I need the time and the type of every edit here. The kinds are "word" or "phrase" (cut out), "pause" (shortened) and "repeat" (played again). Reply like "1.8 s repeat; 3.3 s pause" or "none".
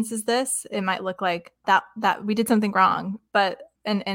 1.6 s word